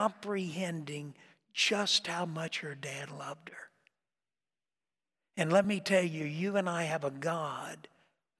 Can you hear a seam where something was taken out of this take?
no; 0 cuts

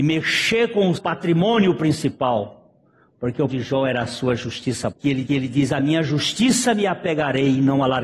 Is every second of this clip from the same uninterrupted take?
no; 4 cuts; at 1.0 s, 3.5 s, 4.9 s, 5.3 s

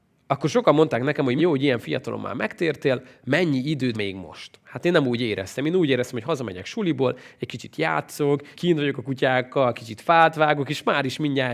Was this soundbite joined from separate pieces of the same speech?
yes; 3 cuts; at 1.4 s, 3.9 s, 8.5 s

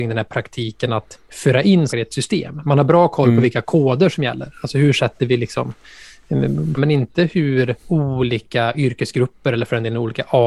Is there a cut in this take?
yes; 4 cuts; at 1.2 s, 1.9 s, 6.8 s, 7.8 s

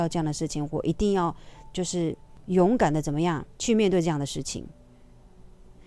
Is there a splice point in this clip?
yes; 1 cut; at 3.5 s

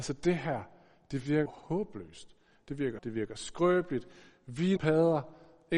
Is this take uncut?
no; 3 cuts; at 1.5 s, 3.0 s, 4.8 s

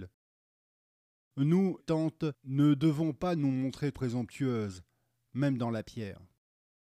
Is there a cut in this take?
yes; 2 cuts; at 1.8 s, 3.9 s

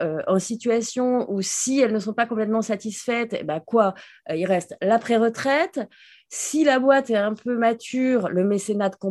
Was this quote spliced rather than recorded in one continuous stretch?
no; 0 cuts

